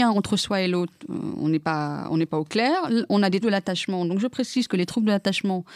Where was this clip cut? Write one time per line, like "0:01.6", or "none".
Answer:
0:03.4